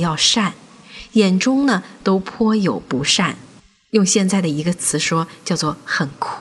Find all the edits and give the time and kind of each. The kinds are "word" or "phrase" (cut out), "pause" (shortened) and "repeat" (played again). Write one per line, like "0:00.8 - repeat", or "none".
none

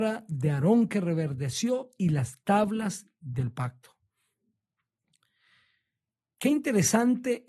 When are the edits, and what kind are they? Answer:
none

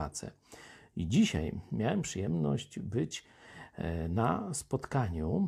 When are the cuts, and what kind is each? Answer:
none

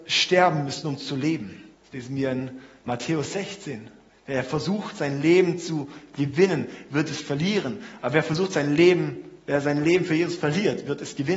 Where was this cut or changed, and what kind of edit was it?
0:01.7 - pause
0:04.1 - pause

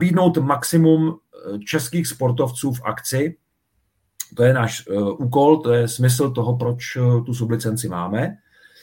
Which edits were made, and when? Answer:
none

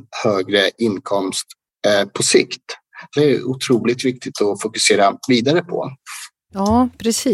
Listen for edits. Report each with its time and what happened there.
0:03.2 - phrase

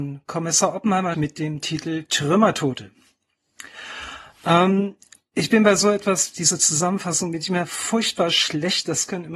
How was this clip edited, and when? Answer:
0:01.1 - word

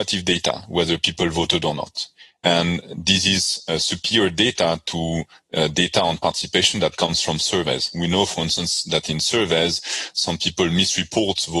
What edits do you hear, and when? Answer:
none

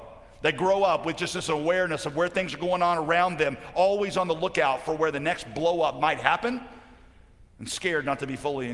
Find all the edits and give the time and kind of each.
none

